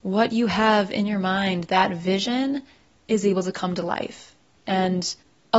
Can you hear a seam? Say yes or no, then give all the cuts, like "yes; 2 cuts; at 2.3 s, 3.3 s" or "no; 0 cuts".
no; 0 cuts